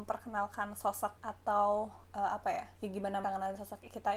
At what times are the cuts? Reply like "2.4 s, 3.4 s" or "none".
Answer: 1.2 s, 2.0 s, 2.7 s, 3.2 s